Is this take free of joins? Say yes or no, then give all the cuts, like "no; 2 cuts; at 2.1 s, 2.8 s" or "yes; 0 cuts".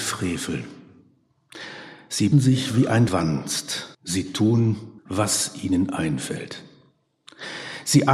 no; 4 cuts; at 2.3 s, 3.1 s, 3.9 s, 5.0 s